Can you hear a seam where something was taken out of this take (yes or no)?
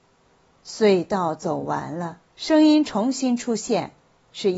yes